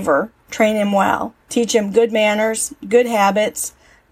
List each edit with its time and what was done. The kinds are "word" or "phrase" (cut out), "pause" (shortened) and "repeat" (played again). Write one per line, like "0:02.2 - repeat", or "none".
0:01.4 - pause